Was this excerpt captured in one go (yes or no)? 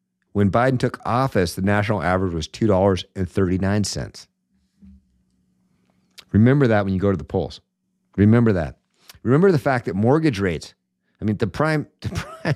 no